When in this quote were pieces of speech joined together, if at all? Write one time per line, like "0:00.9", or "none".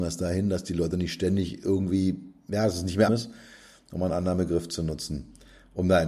0:03.1